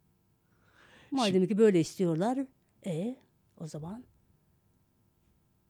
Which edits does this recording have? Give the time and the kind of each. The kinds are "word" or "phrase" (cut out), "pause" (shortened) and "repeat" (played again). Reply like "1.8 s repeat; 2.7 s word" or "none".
none